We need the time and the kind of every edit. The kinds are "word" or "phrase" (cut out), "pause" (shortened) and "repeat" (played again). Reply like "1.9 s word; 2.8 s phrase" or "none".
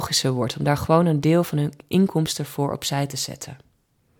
none